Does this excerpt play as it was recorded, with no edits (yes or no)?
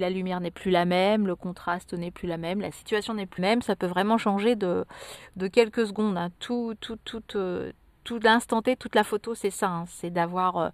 no